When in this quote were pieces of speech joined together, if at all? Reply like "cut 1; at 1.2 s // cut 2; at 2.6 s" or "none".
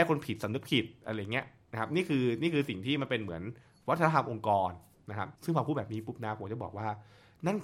cut 1; at 5.4 s